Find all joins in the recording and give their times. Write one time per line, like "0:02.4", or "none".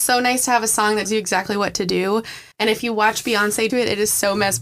0:01.0
0:02.5
0:03.7